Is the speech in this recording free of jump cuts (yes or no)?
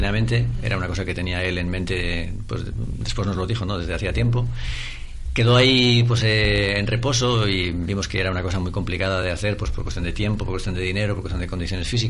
yes